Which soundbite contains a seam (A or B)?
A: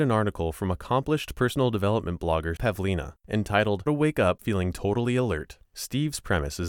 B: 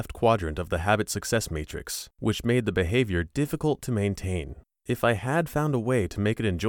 A